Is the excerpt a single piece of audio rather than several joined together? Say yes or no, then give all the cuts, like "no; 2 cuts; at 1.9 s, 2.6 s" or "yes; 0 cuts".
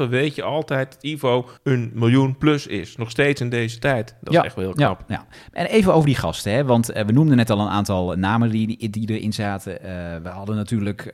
no; 1 cut; at 1.6 s